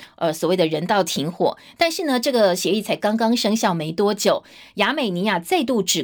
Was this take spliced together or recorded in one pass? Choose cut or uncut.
uncut